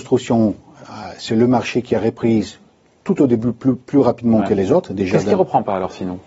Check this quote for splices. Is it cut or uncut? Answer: uncut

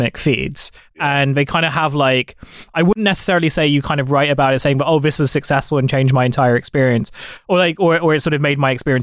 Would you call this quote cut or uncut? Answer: uncut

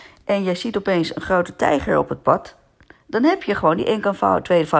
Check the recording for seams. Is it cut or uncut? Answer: uncut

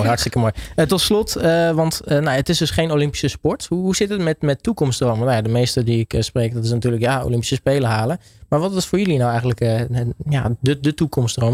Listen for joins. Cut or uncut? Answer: uncut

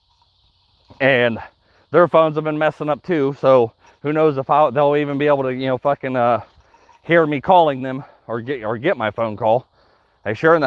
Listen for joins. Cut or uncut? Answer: uncut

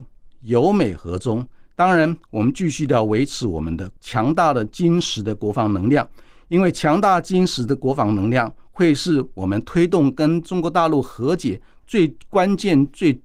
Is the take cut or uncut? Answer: uncut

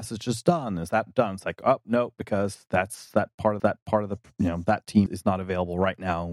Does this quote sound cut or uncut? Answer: cut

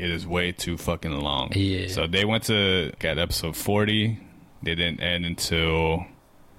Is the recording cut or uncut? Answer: cut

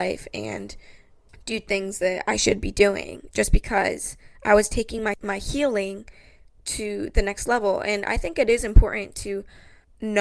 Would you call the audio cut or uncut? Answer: uncut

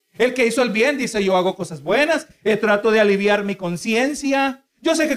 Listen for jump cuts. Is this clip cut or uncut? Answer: uncut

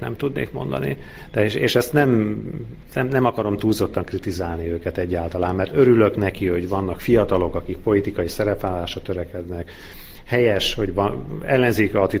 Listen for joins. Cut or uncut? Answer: uncut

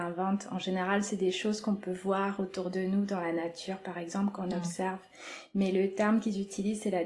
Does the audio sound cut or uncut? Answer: uncut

